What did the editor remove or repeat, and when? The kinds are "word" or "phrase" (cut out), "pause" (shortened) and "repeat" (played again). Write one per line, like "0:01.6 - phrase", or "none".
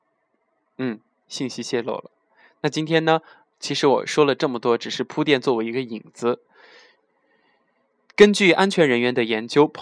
none